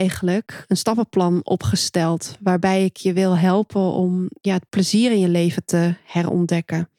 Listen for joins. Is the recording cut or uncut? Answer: uncut